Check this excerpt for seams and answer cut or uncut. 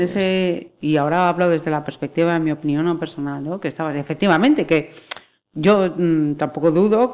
uncut